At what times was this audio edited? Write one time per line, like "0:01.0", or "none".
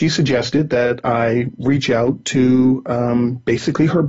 none